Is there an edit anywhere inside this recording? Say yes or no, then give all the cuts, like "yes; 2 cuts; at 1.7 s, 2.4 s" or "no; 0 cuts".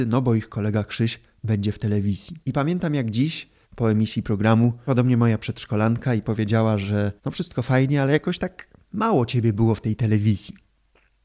yes; 4 cuts; at 2.4 s, 3.6 s, 4.9 s, 7.2 s